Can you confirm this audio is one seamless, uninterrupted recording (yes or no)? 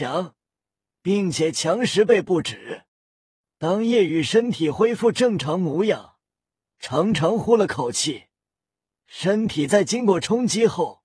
no